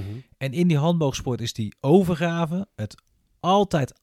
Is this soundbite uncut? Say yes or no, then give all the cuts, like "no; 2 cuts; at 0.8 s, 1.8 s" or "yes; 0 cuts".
yes; 0 cuts